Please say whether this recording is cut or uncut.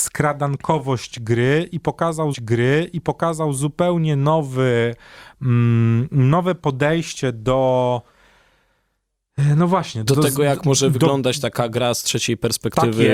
cut